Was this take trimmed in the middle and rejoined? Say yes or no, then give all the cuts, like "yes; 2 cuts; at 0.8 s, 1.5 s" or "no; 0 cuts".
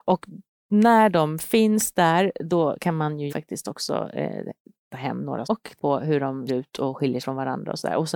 yes; 6 cuts; at 3.3 s, 4.9 s, 5.4 s, 5.8 s, 6.5 s, 7.2 s